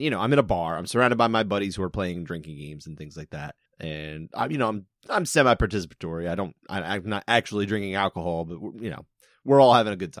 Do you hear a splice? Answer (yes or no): no